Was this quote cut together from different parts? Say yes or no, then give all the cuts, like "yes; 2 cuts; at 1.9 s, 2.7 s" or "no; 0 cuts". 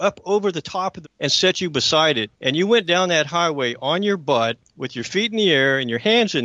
yes; 2 cuts; at 1.0 s, 2.3 s